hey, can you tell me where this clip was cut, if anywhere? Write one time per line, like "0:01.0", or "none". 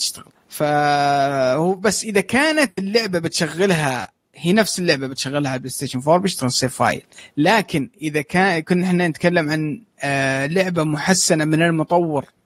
none